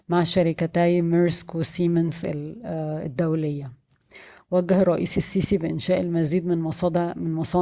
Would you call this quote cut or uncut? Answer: uncut